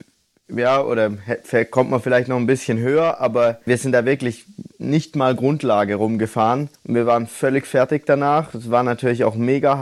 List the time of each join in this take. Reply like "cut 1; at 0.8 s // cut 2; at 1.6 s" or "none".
cut 1; at 3.7 s // cut 2; at 6.7 s